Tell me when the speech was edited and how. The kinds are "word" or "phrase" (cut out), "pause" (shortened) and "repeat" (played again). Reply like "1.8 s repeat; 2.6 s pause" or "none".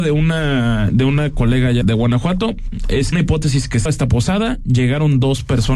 1.8 s word; 3.1 s phrase; 3.9 s phrase